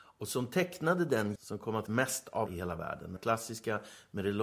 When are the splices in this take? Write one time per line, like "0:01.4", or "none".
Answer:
0:01.4
0:01.9
0:02.5
0:03.2